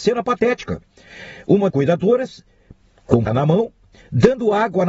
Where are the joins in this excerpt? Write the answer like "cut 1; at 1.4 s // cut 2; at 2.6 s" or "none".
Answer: cut 1; at 1.7 s // cut 2; at 3.3 s